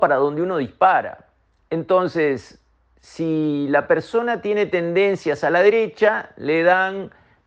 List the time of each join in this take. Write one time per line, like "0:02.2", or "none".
none